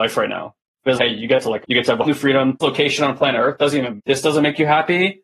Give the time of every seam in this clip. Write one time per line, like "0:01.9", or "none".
0:01.0
0:01.6
0:02.0
0:02.6
0:04.0

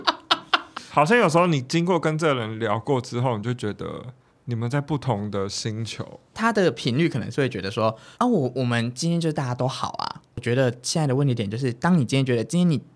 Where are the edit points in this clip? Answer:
0:04.2

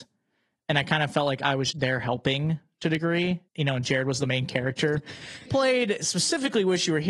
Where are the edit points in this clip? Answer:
0:01.7
0:03.5
0:05.5

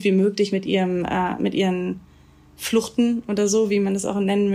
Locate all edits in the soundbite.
none

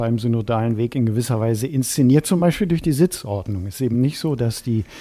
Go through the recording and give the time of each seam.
none

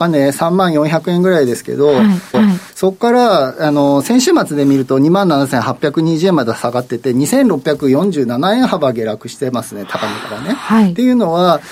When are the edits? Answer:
0:02.3

